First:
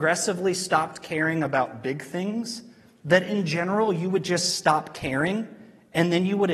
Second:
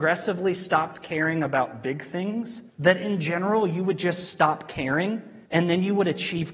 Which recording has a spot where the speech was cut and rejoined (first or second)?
second